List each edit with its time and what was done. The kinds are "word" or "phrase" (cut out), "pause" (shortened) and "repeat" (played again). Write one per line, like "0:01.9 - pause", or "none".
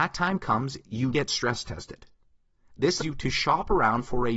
0:01.1 - word
0:03.0 - word